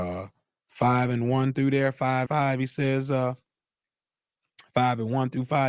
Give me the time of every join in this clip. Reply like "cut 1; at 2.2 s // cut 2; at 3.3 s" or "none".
cut 1; at 2.3 s